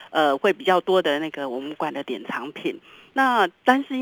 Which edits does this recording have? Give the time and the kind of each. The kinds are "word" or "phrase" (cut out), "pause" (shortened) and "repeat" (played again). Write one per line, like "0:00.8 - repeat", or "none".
none